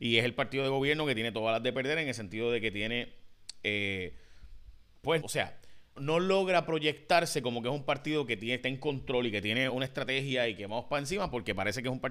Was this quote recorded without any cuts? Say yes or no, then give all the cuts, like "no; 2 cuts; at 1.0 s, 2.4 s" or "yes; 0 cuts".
no; 4 cuts; at 5.2 s, 6.0 s, 8.6 s, 9.7 s